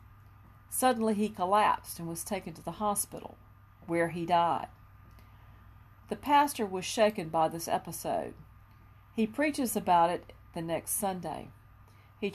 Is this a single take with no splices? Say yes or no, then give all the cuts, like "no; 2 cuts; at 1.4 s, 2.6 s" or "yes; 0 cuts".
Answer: yes; 0 cuts